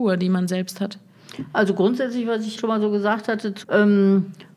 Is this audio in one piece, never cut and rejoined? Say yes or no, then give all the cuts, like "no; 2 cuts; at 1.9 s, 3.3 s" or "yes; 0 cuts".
no; 2 cuts; at 2.6 s, 3.6 s